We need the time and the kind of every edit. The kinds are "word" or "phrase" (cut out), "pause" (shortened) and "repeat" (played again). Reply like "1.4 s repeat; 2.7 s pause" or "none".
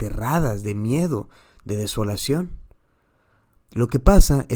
none